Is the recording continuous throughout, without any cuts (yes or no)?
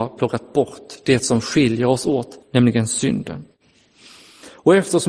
no